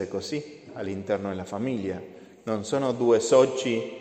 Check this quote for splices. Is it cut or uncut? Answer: uncut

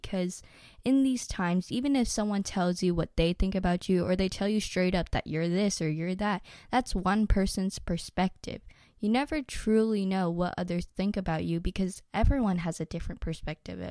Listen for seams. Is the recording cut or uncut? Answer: uncut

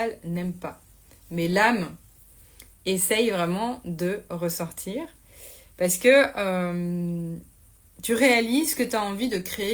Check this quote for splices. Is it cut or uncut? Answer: uncut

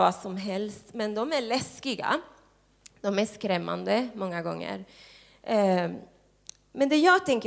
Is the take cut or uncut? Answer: uncut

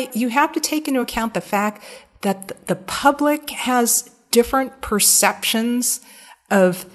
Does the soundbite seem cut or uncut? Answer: uncut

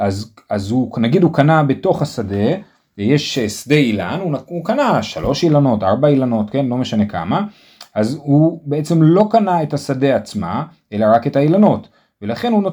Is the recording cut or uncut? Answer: uncut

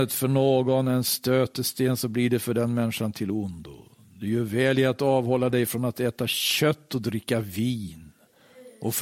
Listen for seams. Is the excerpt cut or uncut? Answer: uncut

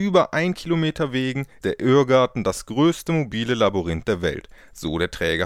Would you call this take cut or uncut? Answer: cut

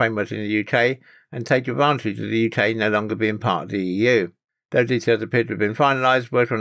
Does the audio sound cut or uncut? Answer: uncut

